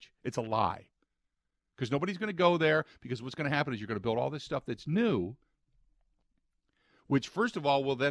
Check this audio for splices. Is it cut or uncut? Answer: uncut